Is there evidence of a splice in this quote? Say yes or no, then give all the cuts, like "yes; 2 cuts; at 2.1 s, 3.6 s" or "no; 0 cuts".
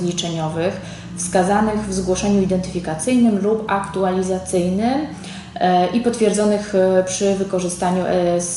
no; 0 cuts